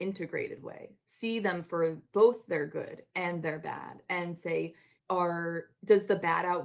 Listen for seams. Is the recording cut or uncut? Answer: cut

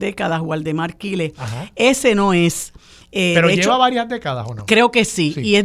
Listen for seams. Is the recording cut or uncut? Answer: uncut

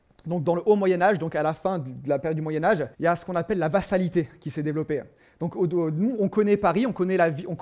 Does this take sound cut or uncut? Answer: cut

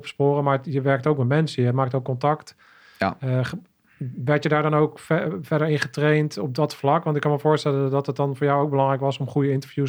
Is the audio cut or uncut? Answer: uncut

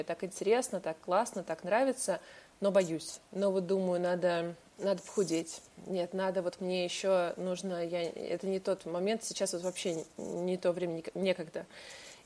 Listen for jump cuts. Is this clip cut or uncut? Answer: cut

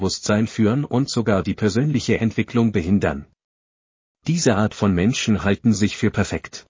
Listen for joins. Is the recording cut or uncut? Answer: uncut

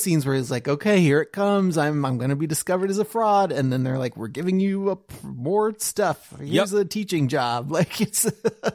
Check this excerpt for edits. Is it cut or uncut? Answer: uncut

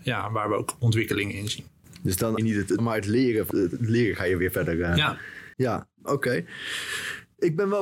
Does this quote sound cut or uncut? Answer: cut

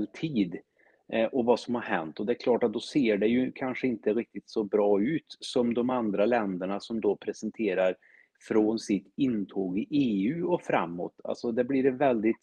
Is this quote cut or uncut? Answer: uncut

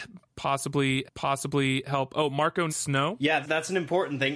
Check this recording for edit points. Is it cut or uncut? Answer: cut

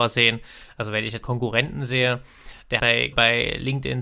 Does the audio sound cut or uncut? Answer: cut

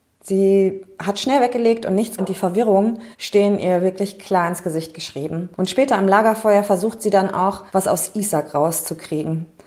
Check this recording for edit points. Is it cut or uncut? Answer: cut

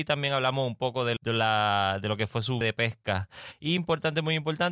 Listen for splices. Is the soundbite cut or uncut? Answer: cut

